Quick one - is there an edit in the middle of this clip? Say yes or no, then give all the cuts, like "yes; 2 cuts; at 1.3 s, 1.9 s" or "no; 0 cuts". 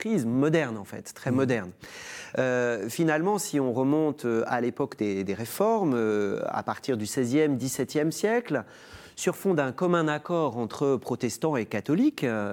no; 0 cuts